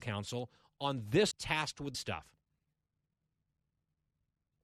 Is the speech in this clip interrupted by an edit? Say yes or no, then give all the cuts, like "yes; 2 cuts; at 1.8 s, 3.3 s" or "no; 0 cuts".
yes; 2 cuts; at 1.3 s, 1.9 s